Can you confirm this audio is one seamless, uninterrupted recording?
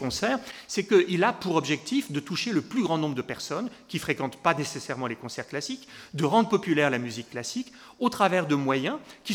yes; 0 cuts

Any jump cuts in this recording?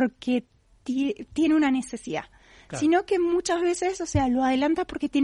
no; 0 cuts

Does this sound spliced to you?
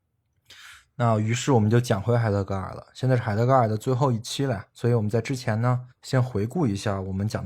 yes; 2 cuts; at 4.7 s, 5.9 s

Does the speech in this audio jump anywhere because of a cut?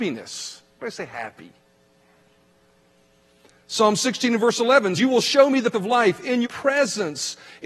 yes; 3 cuts; at 5.0 s, 5.7 s, 6.4 s

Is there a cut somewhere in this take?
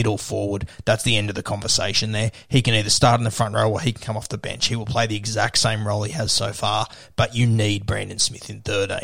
no; 0 cuts

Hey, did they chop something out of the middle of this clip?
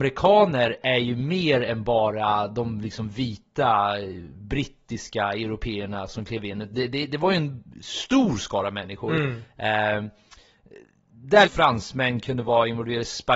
yes; 1 cut; at 11.5 s

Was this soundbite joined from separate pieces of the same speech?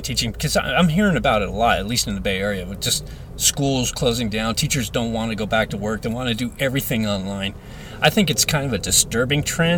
no; 0 cuts

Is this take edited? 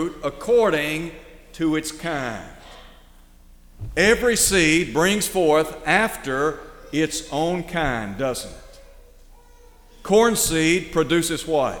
no; 0 cuts

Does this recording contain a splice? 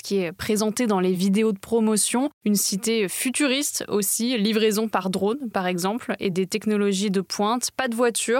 no; 0 cuts

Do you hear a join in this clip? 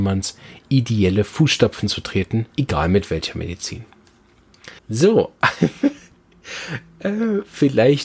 yes; 2 cuts; at 2.5 s, 4.8 s

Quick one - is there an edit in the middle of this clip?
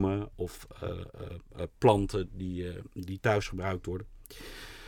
no; 0 cuts

